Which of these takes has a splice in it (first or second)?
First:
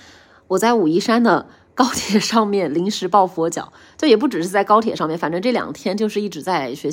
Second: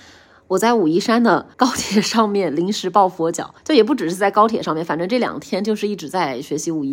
second